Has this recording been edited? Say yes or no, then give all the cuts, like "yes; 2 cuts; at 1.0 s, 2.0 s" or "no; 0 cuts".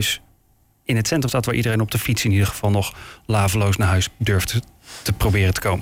yes; 1 cut; at 1.3 s